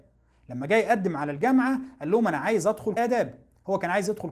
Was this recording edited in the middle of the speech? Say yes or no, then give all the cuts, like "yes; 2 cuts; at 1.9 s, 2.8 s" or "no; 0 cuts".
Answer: yes; 1 cut; at 3.0 s